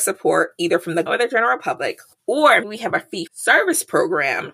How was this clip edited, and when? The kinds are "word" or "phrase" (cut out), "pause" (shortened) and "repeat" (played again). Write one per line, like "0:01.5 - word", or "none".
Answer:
0:01.1 - word
0:02.6 - word
0:03.3 - word